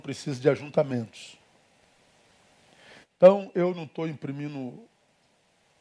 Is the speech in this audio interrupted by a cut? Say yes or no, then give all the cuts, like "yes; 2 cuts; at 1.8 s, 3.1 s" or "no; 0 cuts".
no; 0 cuts